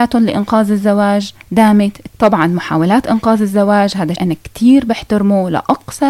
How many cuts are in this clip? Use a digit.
2